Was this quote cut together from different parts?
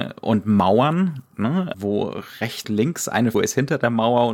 yes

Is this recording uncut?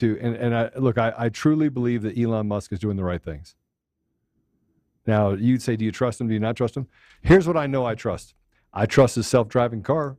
yes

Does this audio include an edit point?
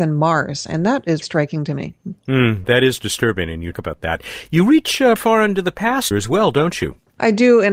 yes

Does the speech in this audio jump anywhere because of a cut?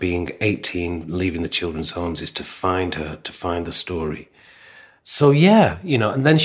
no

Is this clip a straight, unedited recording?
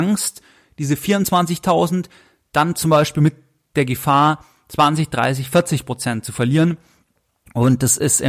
yes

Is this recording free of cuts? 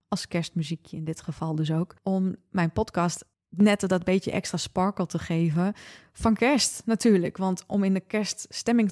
yes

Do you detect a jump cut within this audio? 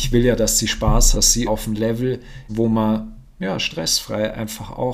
yes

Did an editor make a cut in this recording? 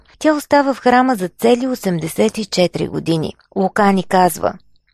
yes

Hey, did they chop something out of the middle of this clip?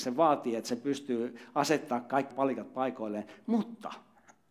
yes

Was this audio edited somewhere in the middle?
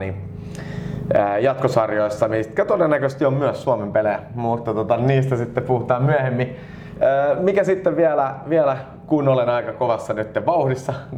no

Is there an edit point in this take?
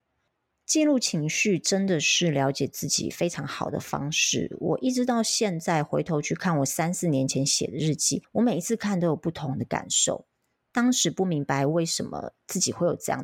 no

